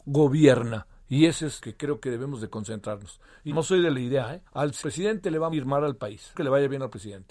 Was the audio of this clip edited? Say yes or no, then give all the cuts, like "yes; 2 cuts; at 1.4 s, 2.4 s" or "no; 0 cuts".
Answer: yes; 6 cuts; at 1.6 s, 3.5 s, 4.5 s, 4.8 s, 5.5 s, 6.3 s